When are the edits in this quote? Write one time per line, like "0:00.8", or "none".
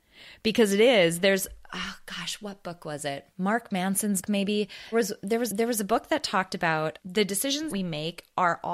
0:03.3
0:04.2
0:04.9
0:05.5
0:07.0
0:07.7